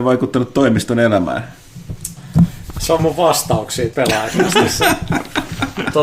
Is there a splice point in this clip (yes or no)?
yes